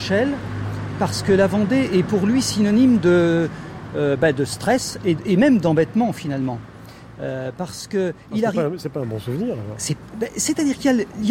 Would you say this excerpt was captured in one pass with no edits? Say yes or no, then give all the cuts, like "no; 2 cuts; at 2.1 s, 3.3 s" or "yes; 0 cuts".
yes; 0 cuts